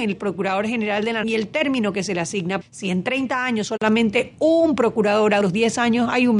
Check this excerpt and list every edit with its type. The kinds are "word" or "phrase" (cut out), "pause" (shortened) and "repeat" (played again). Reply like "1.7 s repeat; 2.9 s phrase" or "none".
1.2 s word; 2.6 s word; 5.4 s word